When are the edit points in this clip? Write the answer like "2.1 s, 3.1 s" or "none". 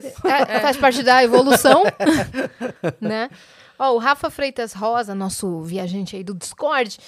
none